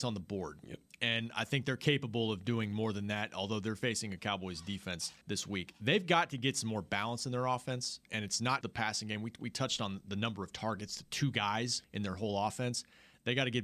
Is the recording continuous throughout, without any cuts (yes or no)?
no